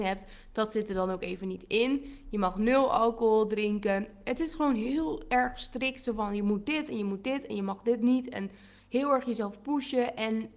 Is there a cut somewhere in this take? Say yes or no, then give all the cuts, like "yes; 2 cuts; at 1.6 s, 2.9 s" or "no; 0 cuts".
no; 0 cuts